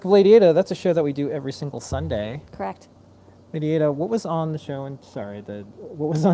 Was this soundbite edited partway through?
no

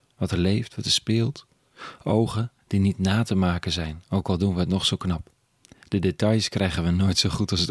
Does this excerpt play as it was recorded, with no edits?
yes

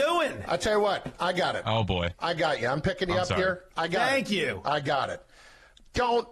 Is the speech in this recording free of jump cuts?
yes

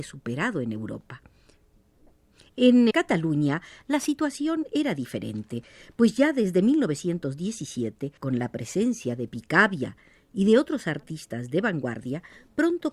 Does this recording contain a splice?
yes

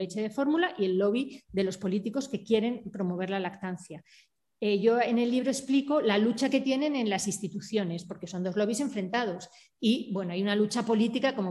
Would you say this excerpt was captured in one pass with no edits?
yes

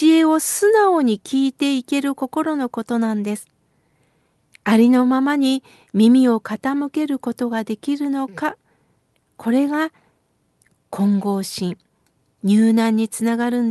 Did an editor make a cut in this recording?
no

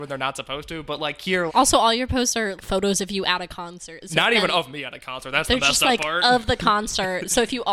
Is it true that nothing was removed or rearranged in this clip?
no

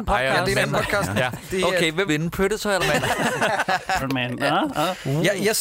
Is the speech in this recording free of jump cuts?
no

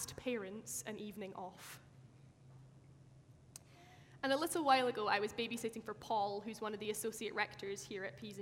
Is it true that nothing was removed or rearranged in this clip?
yes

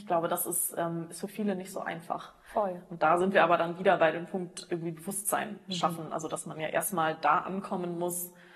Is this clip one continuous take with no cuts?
yes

